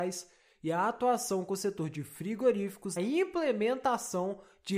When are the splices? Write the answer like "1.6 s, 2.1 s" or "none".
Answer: 3.0 s

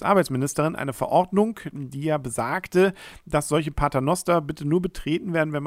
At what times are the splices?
none

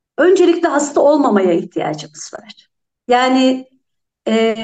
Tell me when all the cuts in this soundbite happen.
none

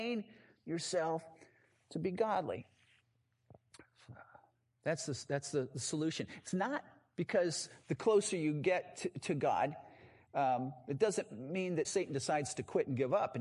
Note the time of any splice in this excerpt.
11.8 s

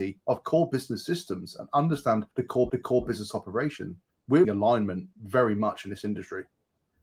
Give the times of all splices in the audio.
2.3 s, 2.7 s, 4.4 s, 5.1 s

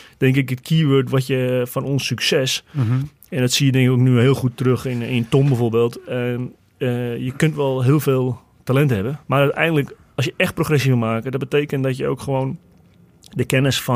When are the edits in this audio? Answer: 9.2 s

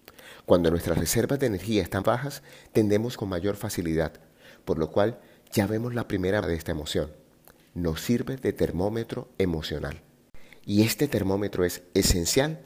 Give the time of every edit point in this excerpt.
2.0 s, 3.1 s, 6.4 s

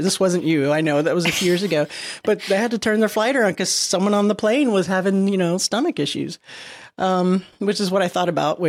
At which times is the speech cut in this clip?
none

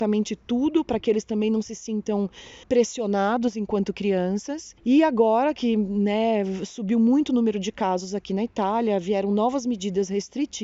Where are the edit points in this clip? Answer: 2.6 s, 4.8 s

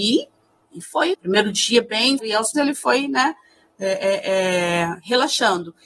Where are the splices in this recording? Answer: 1.1 s, 2.2 s, 2.5 s

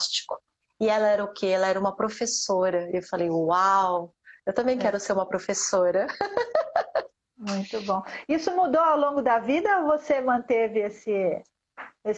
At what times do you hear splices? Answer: none

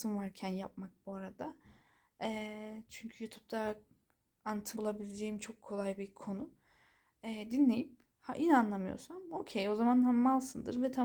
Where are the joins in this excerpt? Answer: 4.8 s

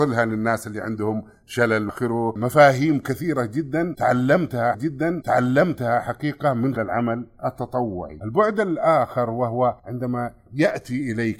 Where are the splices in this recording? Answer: 1.9 s, 4.7 s, 6.8 s, 9.8 s

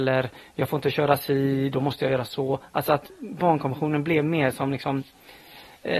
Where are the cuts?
none

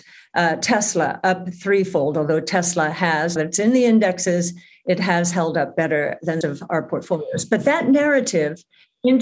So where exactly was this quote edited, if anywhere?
3.4 s, 6.4 s

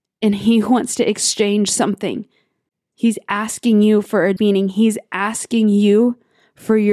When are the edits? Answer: 4.4 s

